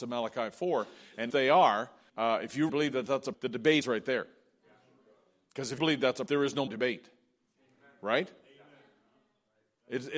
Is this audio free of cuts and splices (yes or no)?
no